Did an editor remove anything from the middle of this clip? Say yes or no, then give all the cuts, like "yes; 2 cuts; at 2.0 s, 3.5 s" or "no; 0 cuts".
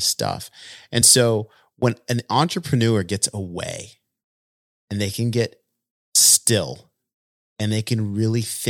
no; 0 cuts